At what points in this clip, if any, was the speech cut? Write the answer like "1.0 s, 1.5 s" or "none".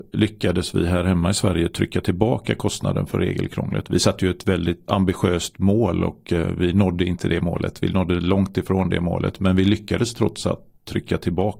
4.9 s